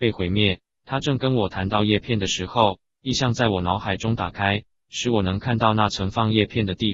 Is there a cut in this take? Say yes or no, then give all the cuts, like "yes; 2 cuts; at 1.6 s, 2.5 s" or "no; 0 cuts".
no; 0 cuts